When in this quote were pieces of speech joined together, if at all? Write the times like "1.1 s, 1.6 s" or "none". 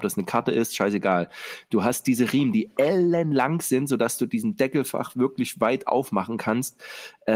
none